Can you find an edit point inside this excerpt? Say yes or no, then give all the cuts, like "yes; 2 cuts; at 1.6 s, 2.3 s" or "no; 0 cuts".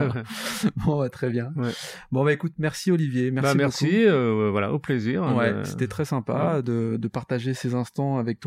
no; 0 cuts